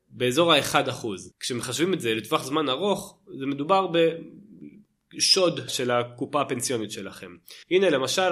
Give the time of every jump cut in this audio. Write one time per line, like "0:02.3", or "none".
0:01.3
0:05.7